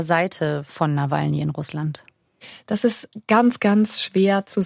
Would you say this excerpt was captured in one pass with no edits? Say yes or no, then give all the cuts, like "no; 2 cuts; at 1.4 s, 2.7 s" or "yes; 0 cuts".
yes; 0 cuts